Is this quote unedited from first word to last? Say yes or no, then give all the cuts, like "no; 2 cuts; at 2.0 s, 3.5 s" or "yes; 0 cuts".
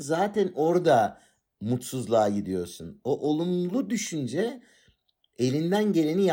yes; 0 cuts